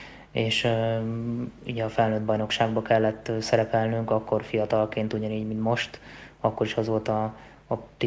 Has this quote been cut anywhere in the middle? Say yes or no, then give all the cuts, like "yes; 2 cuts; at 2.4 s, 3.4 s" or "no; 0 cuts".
no; 0 cuts